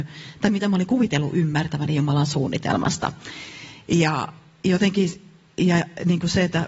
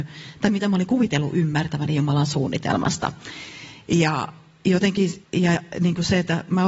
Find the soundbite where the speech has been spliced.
second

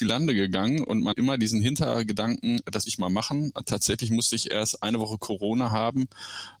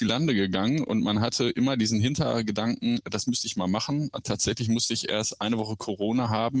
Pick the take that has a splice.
first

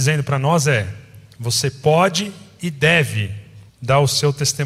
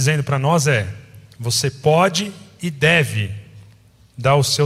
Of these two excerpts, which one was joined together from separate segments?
first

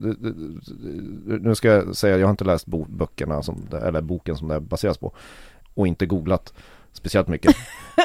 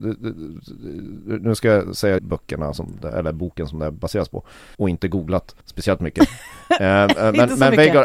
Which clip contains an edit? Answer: second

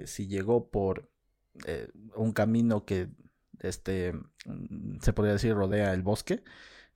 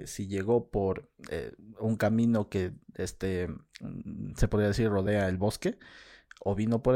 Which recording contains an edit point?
second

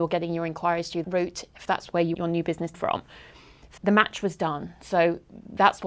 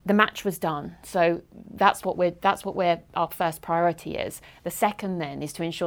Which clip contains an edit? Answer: first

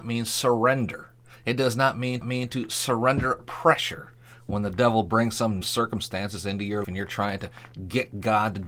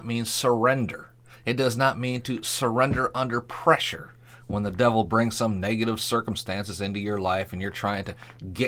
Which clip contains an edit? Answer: first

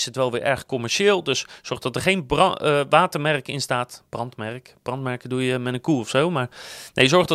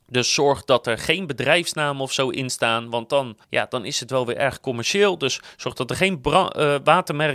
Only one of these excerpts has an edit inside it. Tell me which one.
second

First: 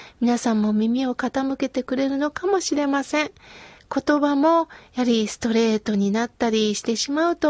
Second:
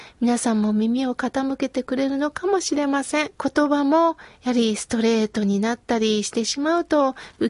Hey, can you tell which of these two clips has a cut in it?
second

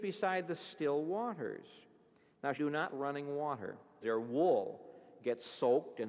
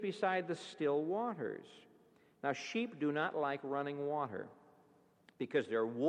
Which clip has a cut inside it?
first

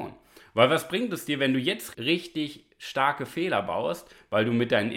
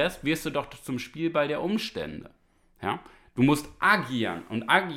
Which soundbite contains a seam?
first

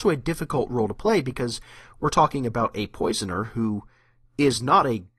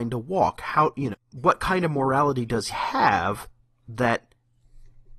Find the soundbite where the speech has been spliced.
second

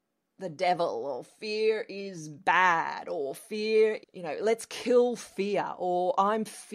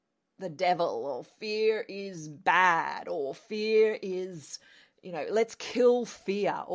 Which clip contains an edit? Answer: first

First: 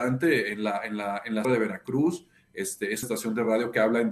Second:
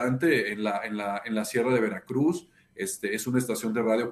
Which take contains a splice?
first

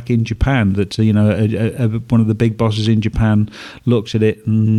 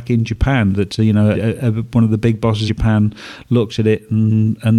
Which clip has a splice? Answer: second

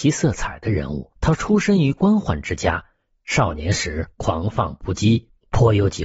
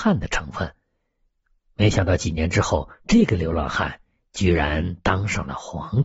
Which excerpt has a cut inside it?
first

